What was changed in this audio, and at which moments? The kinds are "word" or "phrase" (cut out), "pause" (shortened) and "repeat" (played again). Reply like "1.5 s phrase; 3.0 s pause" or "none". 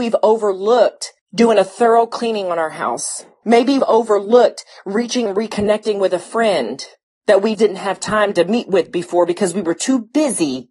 3.8 s word; 5.3 s word; 7.5 s word